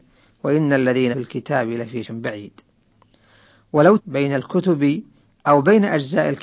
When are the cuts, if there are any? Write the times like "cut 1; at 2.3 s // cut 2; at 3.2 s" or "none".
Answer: cut 1; at 1.1 s // cut 2; at 2.0 s // cut 3; at 4.0 s

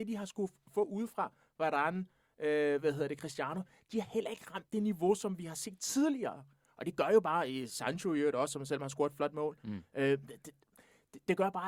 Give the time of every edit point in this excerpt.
none

